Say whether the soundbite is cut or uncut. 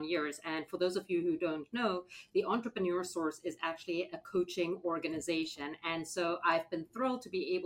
uncut